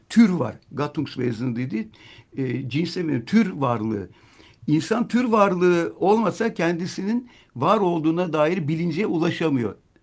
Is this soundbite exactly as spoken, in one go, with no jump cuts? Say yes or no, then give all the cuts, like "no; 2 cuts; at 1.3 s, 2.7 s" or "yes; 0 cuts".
yes; 0 cuts